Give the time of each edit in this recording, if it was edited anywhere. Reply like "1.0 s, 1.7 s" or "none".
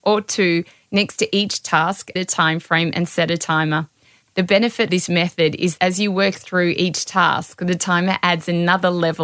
2.2 s, 4.9 s, 5.8 s